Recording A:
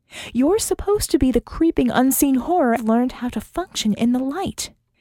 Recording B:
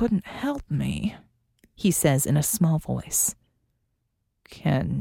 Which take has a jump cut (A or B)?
A